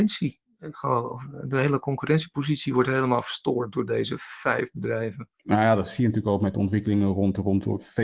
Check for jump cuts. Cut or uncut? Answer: cut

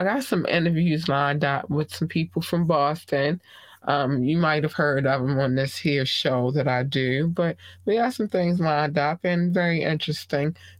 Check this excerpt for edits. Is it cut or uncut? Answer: uncut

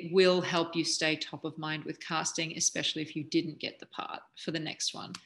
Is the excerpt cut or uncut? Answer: uncut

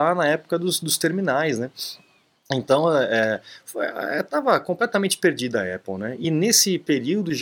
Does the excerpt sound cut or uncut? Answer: uncut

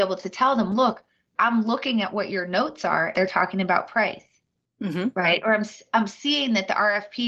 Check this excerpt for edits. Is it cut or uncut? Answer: cut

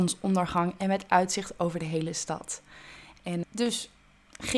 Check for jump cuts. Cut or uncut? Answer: cut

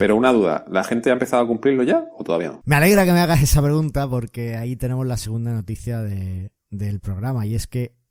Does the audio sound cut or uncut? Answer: uncut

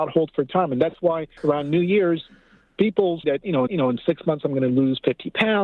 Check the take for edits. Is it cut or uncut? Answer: cut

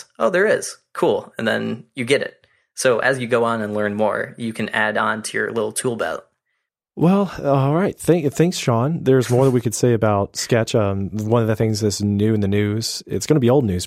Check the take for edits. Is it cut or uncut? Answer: uncut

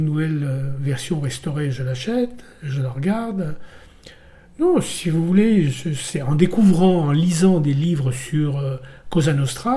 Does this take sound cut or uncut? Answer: uncut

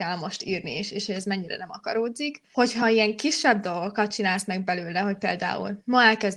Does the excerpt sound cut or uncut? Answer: uncut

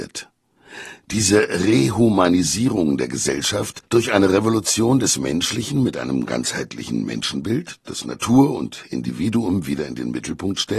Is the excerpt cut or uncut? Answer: uncut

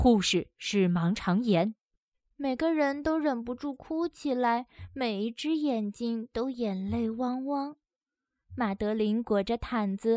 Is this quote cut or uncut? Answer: uncut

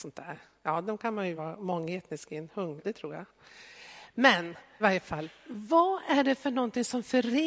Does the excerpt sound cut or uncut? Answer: cut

